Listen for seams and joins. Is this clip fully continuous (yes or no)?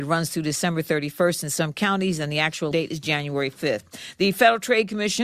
no